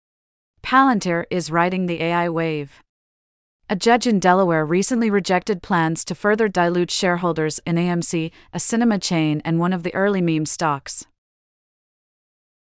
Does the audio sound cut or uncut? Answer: uncut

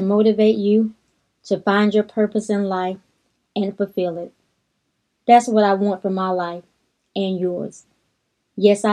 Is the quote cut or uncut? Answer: uncut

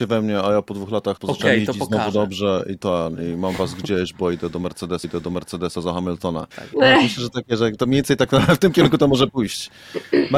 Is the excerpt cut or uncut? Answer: cut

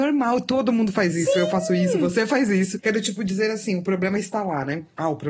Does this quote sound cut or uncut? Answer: uncut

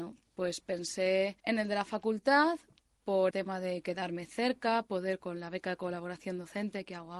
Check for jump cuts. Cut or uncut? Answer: cut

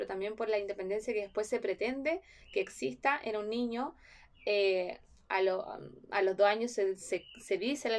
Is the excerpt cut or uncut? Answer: uncut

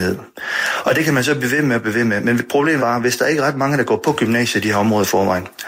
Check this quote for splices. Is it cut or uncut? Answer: cut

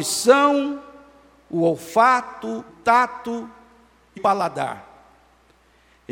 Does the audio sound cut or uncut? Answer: cut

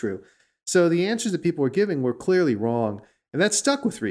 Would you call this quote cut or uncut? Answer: uncut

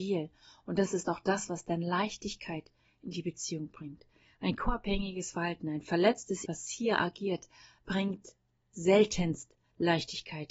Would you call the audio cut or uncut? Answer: cut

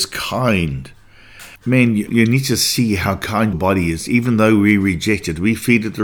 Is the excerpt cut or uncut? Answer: cut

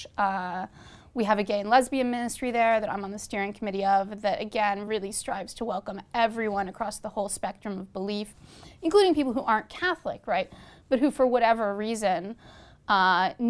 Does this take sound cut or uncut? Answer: uncut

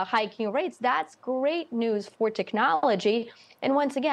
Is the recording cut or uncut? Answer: uncut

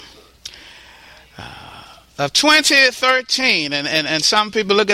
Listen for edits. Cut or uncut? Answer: uncut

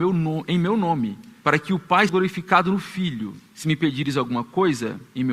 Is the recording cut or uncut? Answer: cut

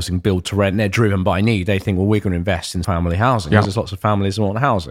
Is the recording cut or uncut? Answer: cut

